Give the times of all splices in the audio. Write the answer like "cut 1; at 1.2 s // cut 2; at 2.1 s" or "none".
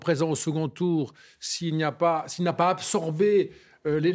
none

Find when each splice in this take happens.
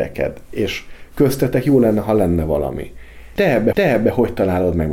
cut 1; at 3.7 s

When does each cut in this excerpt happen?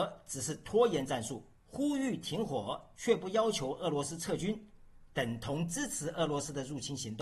cut 1; at 1.6 s

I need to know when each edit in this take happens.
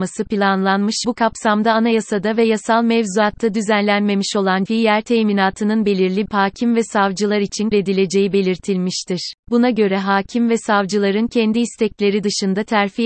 cut 1; at 1.0 s // cut 2; at 4.7 s // cut 3; at 6.3 s // cut 4; at 7.7 s // cut 5; at 9.4 s

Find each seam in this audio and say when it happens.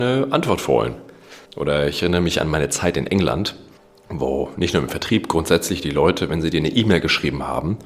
cut 1; at 1.4 s

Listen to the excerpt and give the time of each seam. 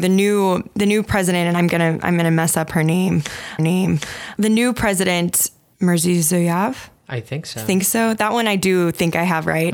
cut 1; at 3.6 s // cut 2; at 7.0 s

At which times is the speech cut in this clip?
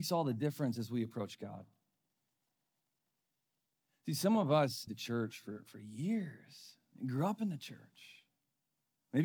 cut 1; at 4.9 s

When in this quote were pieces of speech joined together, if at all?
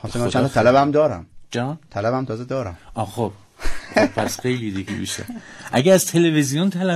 cut 1; at 4.9 s

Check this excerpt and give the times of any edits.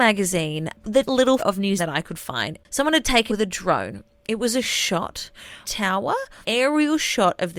cut 1; at 1.1 s // cut 2; at 1.4 s // cut 3; at 1.8 s // cut 4; at 3.3 s // cut 5; at 5.6 s // cut 6; at 6.4 s

